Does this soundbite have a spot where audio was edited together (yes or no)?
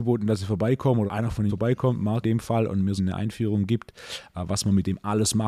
yes